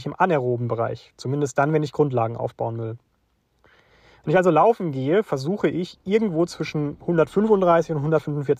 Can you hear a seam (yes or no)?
no